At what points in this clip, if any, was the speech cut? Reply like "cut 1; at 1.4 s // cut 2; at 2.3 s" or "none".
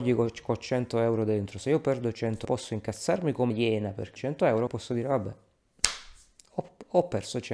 cut 1; at 2.4 s // cut 2; at 3.5 s // cut 3; at 4.2 s // cut 4; at 4.7 s